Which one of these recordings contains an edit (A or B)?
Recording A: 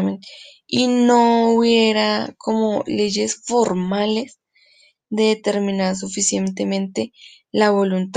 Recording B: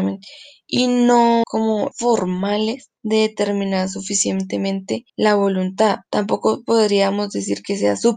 B